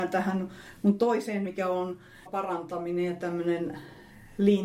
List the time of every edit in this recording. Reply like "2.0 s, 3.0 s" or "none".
1.5 s, 2.3 s